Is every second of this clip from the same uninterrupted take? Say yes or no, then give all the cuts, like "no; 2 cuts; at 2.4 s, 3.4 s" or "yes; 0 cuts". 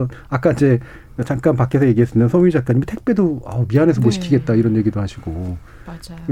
yes; 0 cuts